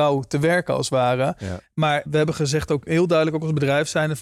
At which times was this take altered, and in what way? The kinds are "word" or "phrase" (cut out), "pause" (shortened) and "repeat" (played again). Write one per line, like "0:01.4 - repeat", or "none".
0:02.1 - word
0:02.9 - word

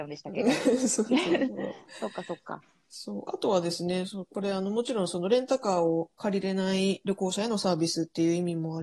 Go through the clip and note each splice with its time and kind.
none

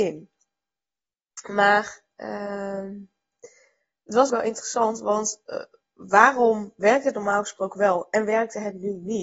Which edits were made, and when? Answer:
0:04.3 - word

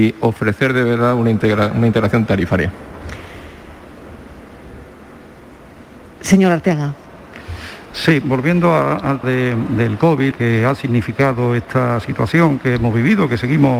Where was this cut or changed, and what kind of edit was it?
0:08.2 - word
0:09.2 - word
0:10.3 - word

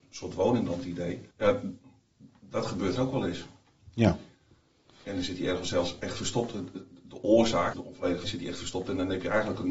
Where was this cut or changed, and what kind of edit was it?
0:01.3 - pause
0:03.0 - word
0:06.0 - word
0:07.7 - phrase
0:08.2 - word

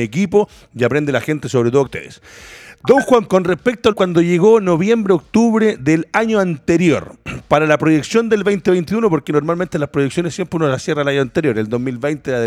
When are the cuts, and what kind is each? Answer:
0:01.9 - phrase
0:03.3 - word
0:03.9 - phrase

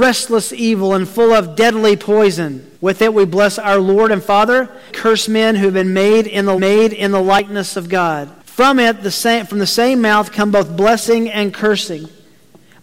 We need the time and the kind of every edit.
0:02.8 - pause
0:04.9 - phrase
0:06.6 - repeat
0:08.4 - pause

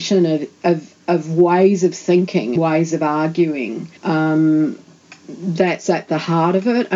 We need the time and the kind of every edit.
0:02.6 - word
0:04.0 - pause

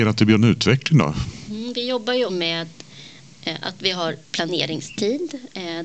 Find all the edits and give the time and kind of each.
0:02.3 - word

